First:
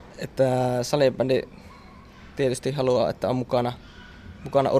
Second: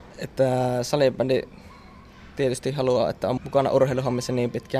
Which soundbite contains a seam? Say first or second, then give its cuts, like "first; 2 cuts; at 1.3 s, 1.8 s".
second; 1 cut; at 3.4 s